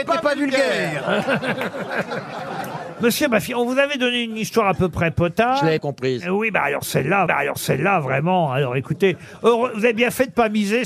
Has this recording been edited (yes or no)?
yes